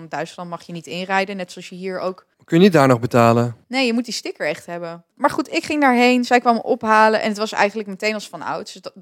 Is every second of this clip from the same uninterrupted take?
no; 3 cuts; at 2.3 s, 3.6 s, 5.1 s

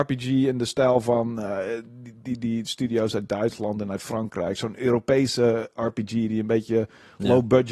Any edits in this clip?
no; 0 cuts

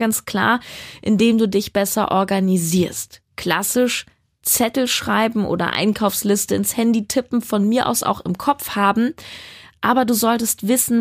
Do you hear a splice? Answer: no; 0 cuts

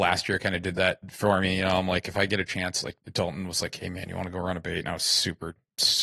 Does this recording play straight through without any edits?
yes; 0 cuts

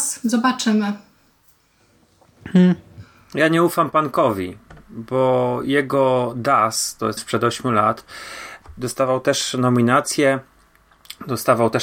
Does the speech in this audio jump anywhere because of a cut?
yes; 1 cut; at 7.2 s

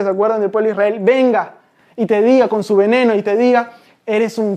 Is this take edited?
no; 0 cuts

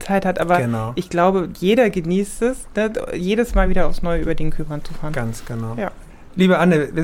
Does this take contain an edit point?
no; 0 cuts

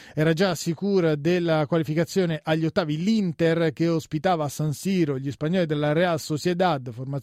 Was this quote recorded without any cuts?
yes; 0 cuts

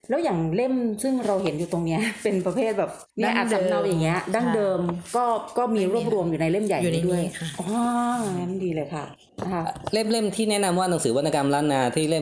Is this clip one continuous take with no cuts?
no; 1 cut; at 3.1 s

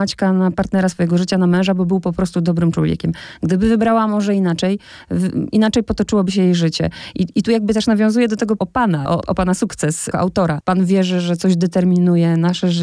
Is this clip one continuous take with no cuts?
no; 3 cuts; at 8.6 s, 9.2 s, 10.1 s

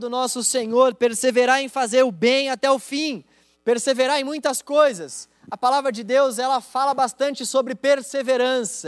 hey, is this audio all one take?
no; 1 cut; at 3.5 s

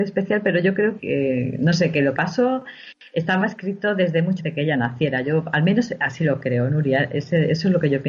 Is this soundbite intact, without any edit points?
no; 3 cuts; at 1.0 s, 2.2 s, 4.4 s

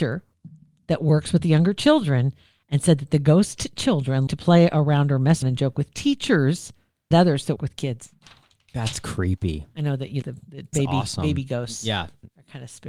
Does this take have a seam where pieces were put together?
yes; 6 cuts; at 4.3 s, 5.4 s, 7.1 s, 7.6 s, 10.2 s, 10.7 s

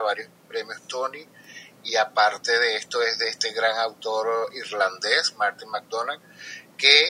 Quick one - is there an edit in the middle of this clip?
no; 0 cuts

